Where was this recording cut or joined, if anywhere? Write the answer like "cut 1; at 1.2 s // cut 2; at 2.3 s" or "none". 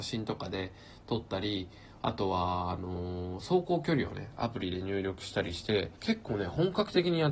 cut 1; at 5.9 s